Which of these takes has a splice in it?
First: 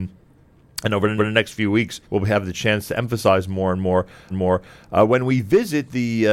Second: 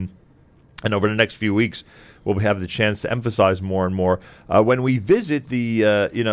first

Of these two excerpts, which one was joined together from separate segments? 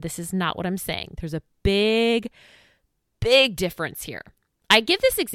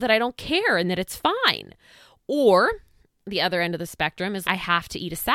second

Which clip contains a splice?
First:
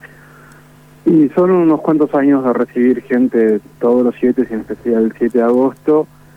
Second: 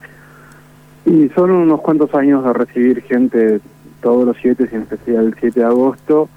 first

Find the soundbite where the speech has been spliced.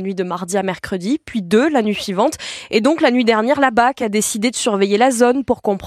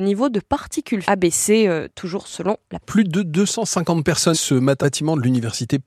second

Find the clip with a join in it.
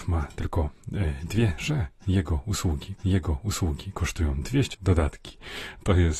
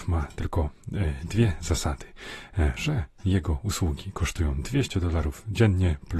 first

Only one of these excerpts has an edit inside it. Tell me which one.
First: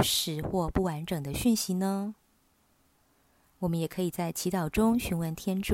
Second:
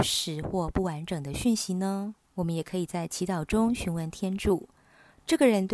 second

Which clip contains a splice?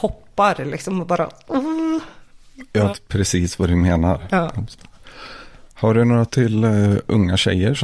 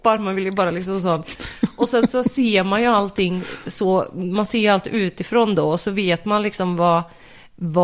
first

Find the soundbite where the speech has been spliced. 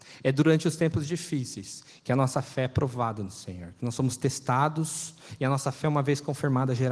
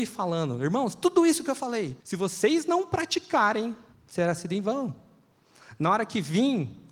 second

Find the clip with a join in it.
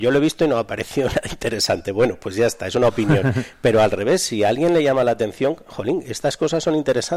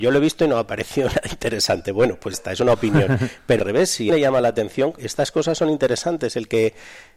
second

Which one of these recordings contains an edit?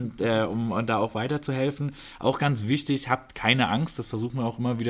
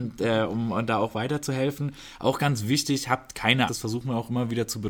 second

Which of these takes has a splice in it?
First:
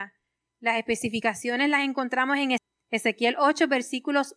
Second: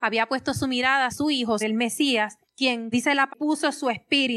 second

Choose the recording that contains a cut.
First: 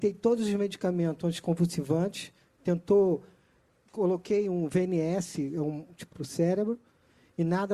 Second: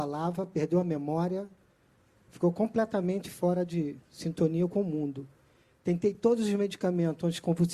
first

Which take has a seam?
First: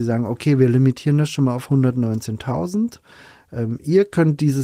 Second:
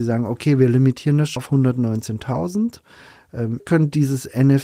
second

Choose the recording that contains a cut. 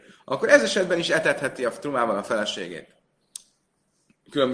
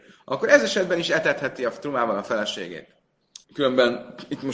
second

